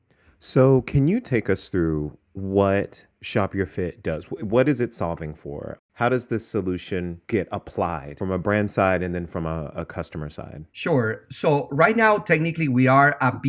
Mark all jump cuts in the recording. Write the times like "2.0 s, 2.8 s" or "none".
3.1 s, 10.7 s